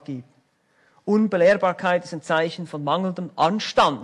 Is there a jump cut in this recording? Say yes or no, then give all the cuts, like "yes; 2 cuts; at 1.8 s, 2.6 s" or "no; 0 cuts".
no; 0 cuts